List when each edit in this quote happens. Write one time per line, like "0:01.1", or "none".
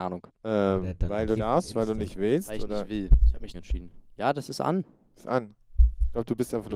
0:01.4
0:03.5